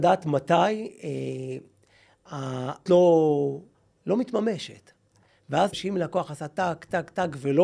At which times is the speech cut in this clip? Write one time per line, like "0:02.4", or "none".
0:02.9
0:03.7
0:05.7